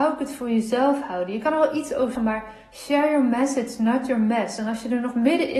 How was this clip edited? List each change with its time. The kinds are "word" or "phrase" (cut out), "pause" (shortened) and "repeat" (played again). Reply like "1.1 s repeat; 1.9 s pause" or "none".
2.1 s word